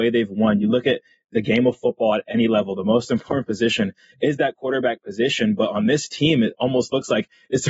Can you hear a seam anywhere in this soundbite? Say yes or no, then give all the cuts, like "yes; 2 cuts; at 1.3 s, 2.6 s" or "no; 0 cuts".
no; 0 cuts